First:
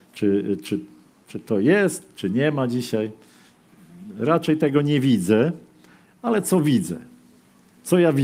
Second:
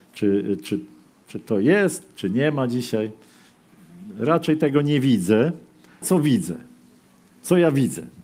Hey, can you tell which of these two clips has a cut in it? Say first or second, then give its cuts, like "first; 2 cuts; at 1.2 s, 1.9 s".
second; 1 cut; at 6.0 s